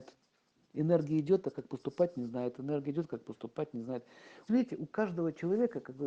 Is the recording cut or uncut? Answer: cut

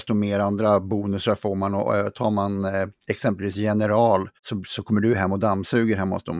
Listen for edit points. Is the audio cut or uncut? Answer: cut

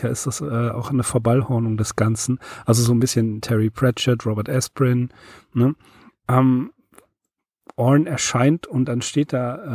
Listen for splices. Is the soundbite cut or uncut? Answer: cut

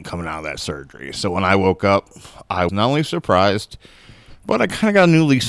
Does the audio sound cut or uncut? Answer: cut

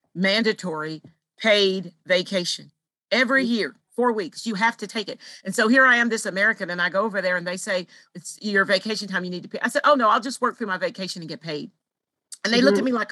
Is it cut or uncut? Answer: uncut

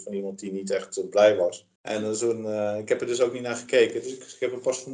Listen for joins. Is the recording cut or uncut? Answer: cut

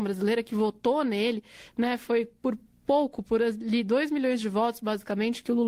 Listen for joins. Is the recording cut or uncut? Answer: uncut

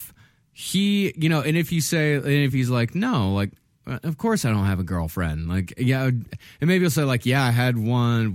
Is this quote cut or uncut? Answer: uncut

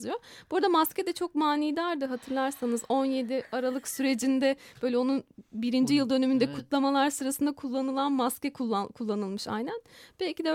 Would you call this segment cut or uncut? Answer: uncut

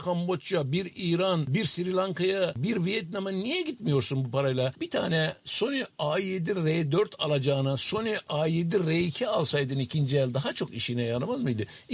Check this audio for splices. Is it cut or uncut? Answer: uncut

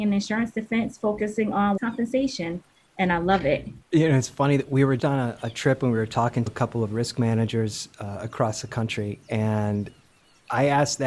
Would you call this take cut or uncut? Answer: cut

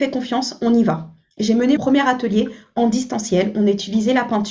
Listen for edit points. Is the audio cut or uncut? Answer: cut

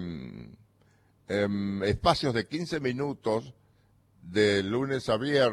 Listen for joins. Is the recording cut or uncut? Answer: uncut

